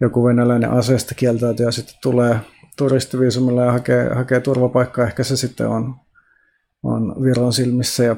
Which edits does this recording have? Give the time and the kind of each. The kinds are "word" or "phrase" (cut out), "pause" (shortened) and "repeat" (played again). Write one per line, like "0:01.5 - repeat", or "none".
none

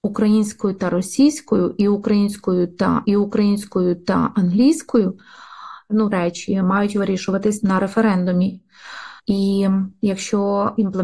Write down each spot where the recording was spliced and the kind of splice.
0:03.0 - repeat
0:06.1 - phrase
0:07.6 - word
0:09.2 - pause

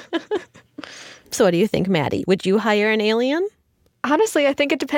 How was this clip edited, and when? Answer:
none

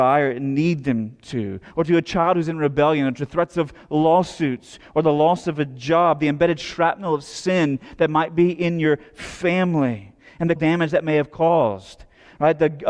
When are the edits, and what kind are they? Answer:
0:10.6 - word

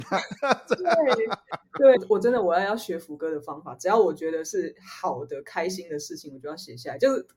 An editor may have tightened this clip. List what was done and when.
0:02.0 - phrase

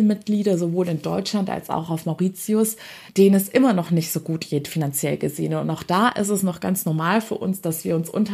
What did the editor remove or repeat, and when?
0:03.1 - pause

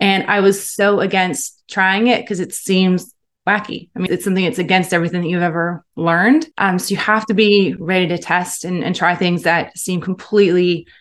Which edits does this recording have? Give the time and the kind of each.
0:04.1 - word
0:06.5 - pause

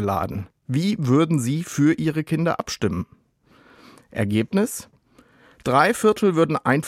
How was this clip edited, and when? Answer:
none

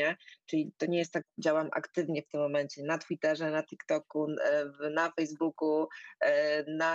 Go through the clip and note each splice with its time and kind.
0:01.2 - word

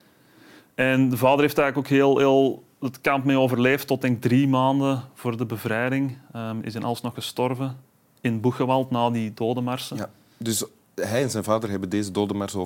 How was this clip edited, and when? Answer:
none

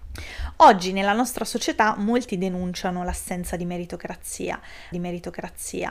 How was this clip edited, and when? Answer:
0:04.9 - repeat

